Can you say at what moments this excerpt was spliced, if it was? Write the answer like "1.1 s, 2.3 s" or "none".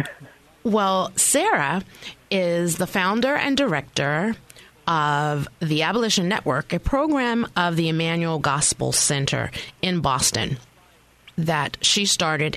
none